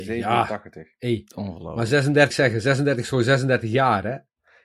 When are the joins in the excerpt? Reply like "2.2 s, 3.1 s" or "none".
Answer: 2.3 s